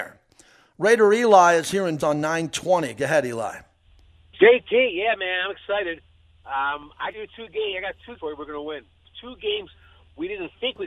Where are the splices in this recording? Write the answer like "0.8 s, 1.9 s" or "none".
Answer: 2.0 s, 7.1 s, 8.2 s